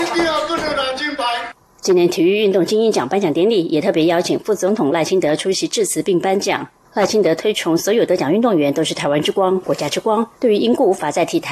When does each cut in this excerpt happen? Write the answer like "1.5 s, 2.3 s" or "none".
10.4 s